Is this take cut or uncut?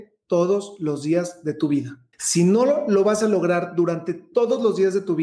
cut